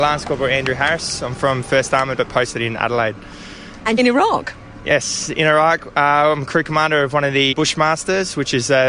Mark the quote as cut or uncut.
cut